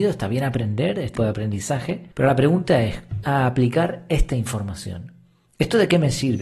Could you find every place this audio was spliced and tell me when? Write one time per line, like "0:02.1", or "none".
0:01.1
0:02.1
0:03.2